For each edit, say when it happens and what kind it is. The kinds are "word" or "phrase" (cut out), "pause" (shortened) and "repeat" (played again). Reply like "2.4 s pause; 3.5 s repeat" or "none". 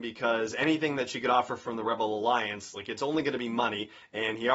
none